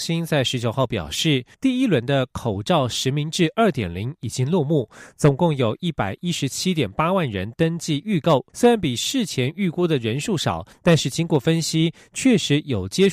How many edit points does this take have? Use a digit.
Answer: 2